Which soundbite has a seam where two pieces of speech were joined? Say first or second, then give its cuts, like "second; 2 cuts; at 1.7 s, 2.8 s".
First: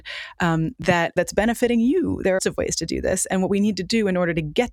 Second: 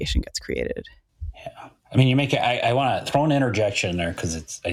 first; 2 cuts; at 1.2 s, 2.4 s